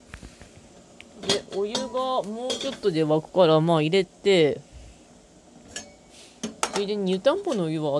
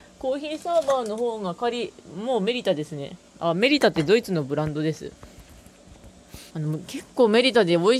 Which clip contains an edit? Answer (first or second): second